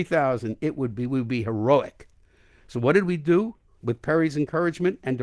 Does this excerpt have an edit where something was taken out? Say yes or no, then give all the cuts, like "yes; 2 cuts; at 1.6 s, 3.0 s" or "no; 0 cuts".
no; 0 cuts